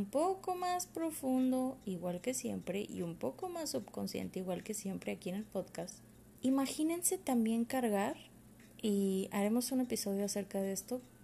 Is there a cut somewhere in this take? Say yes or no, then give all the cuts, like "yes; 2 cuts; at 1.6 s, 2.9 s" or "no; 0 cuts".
yes; 2 cuts; at 6.1 s, 8.5 s